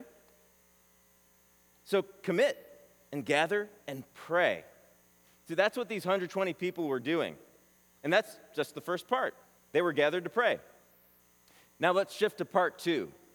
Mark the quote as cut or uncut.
uncut